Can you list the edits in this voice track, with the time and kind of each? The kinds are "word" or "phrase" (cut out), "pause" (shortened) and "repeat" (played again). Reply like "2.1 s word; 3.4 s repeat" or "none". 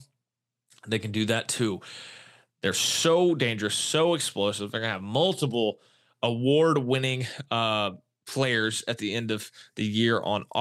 none